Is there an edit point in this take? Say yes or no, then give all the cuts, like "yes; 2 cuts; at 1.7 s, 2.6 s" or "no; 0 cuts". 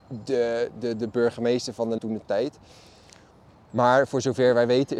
yes; 1 cut; at 2.0 s